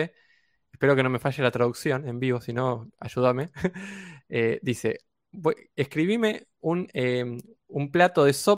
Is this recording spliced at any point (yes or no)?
no